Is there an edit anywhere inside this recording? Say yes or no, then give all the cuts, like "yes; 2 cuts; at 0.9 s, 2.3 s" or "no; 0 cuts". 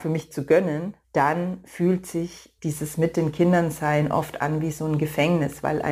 yes; 2 cuts; at 1.0 s, 2.6 s